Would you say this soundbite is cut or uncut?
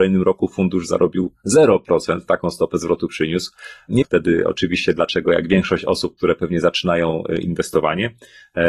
cut